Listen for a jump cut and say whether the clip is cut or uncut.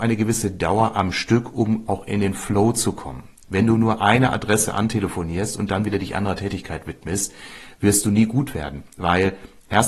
uncut